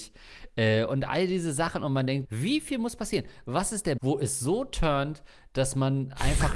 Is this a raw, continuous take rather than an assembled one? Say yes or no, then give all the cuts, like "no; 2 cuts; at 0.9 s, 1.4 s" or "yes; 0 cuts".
no; 2 cuts; at 2.2 s, 4.0 s